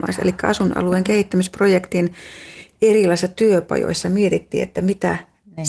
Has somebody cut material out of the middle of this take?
no; 0 cuts

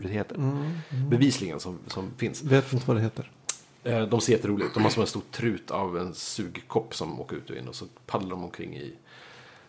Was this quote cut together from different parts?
no; 0 cuts

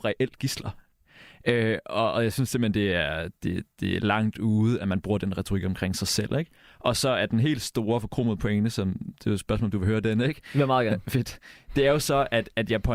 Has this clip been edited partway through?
no; 0 cuts

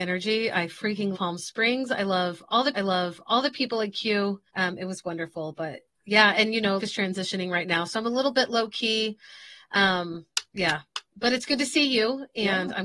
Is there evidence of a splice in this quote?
yes; 5 cuts; at 1.1 s, 2.7 s, 4.5 s, 6.8 s, 10.5 s

